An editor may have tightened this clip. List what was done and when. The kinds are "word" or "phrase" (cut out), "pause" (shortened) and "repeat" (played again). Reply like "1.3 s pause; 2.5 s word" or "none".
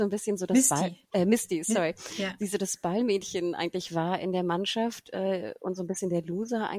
1.0 s pause